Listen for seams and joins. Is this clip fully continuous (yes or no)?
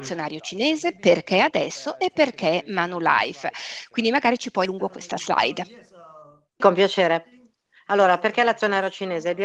no